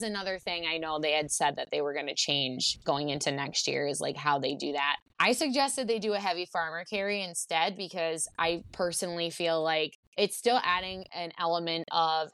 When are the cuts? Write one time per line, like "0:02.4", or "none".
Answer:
0:05.1
0:10.0